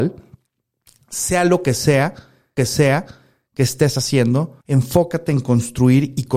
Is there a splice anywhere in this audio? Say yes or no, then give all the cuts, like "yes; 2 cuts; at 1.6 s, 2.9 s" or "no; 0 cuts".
yes; 2 cuts; at 2.6 s, 4.6 s